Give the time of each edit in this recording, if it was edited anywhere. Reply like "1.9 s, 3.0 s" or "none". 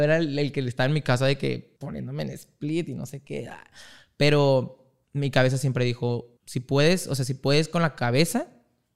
1.8 s, 5.0 s, 6.4 s

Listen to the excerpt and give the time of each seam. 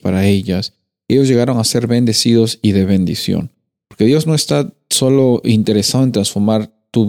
none

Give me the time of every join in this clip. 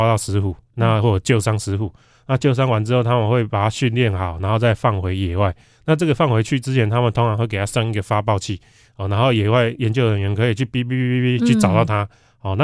none

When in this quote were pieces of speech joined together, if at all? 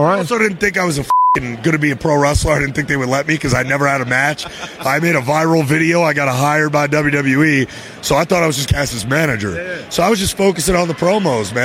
8.7 s

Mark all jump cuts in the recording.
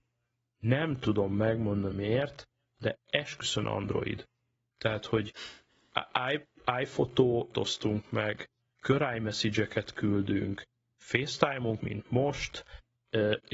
1.9 s, 3.6 s, 7.5 s, 11.8 s

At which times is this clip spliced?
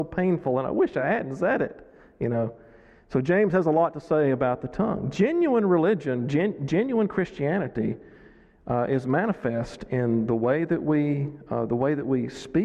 none

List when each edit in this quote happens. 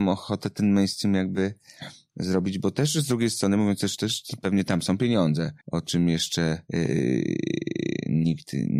5.6 s, 6.7 s

